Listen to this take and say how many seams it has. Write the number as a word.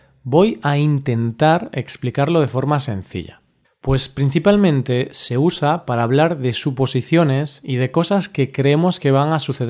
one